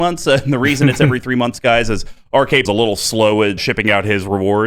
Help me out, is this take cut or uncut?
cut